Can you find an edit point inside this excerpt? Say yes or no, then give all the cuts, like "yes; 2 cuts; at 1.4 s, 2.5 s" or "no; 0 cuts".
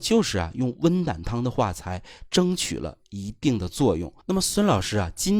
yes; 1 cut; at 4.2 s